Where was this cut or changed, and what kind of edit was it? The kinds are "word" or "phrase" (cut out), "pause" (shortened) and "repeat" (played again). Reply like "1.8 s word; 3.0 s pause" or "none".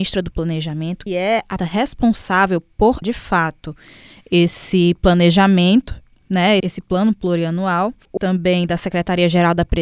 1.1 s word; 1.6 s word; 3.0 s word; 6.6 s word; 8.2 s word